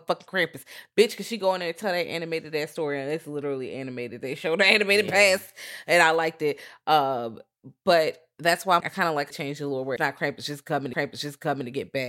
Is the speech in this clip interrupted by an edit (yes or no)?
yes